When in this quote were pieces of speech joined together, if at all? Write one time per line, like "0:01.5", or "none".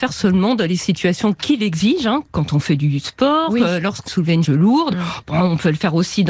0:04.1
0:04.4